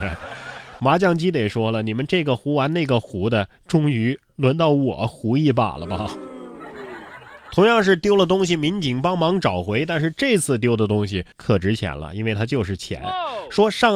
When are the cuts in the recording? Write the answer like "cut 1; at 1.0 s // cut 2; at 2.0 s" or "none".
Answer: cut 1; at 11.3 s